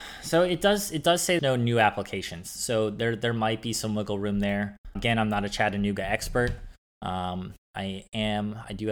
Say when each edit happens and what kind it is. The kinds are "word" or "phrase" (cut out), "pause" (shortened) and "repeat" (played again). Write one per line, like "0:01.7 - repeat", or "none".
0:01.4 - phrase
0:05.0 - word